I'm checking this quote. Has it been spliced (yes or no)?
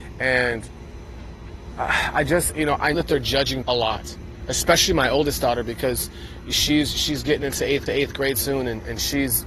yes